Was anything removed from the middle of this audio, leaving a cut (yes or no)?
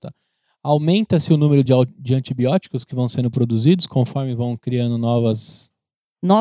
no